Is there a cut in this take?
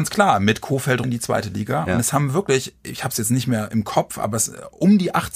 yes; 1 cut; at 1.0 s

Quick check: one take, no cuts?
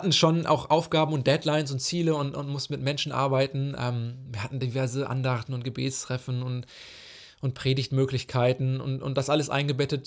yes; 0 cuts

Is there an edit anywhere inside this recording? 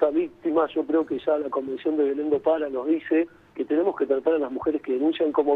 no; 0 cuts

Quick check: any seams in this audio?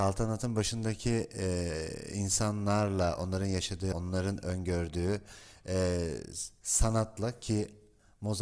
yes; 1 cut; at 3.9 s

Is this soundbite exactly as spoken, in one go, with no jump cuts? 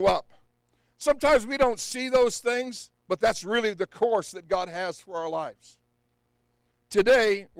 yes; 0 cuts

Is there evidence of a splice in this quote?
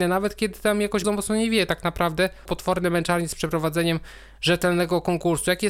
yes; 2 cuts; at 1.0 s, 2.5 s

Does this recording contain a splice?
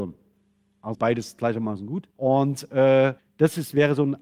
yes; 3 cuts; at 0.9 s, 2.1 s, 3.2 s

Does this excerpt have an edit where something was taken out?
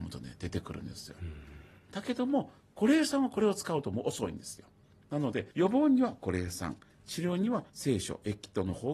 yes; 2 cuts; at 5.5 s, 7.7 s

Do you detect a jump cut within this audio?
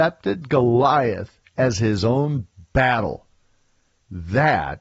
no; 0 cuts

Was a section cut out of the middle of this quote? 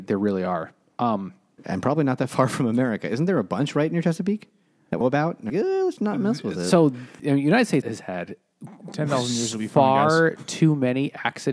yes; 5 cuts; at 5.0 s, 5.5 s, 6.0 s, 7.2 s, 7.8 s

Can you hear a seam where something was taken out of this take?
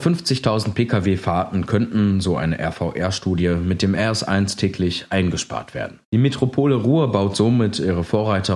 yes; 1 cut; at 6.0 s

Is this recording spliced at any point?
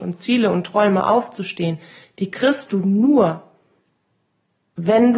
no; 0 cuts

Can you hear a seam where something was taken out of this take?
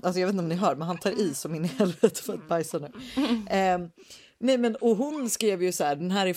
no; 0 cuts

